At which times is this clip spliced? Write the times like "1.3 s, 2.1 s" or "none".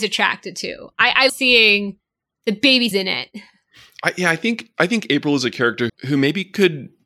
1.3 s, 2.9 s, 5.9 s